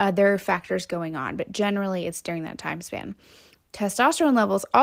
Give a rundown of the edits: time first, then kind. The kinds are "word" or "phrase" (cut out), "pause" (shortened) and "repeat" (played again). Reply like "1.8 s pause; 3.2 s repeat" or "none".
none